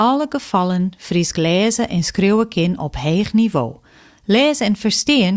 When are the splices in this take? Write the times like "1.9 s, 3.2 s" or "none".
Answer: none

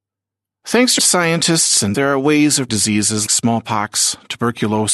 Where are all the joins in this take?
1.0 s, 1.9 s, 2.7 s, 3.3 s

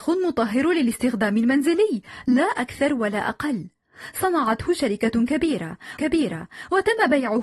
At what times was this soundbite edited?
6.0 s

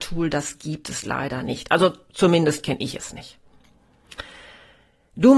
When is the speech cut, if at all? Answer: none

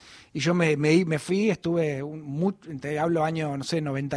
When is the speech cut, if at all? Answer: none

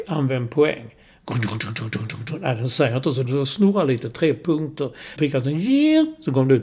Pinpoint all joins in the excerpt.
3.2 s, 5.2 s

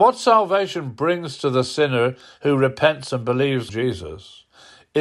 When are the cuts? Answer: 3.7 s

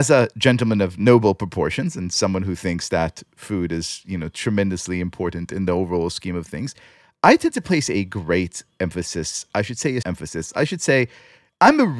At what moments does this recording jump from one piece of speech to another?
10.0 s

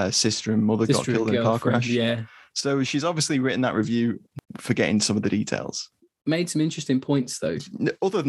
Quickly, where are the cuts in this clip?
none

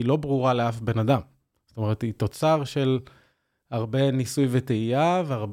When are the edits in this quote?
none

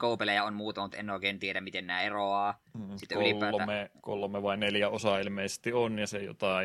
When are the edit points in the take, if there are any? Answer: none

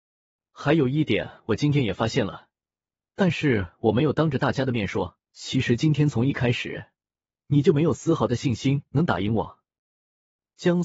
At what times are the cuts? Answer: 5.2 s

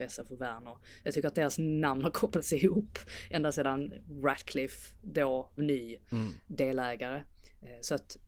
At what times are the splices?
5.6 s

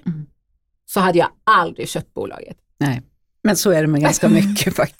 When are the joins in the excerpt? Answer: none

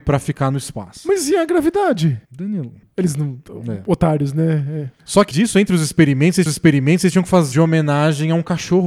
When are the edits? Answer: 2.2 s, 5.0 s, 5.3 s, 6.5 s, 7.5 s

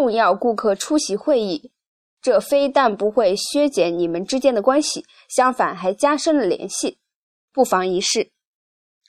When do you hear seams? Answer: none

